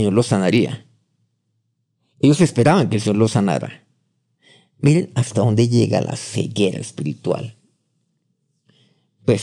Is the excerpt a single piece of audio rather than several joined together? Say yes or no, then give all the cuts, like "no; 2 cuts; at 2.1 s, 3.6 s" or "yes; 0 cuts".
yes; 0 cuts